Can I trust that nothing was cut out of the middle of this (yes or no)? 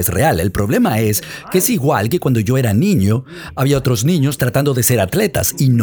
yes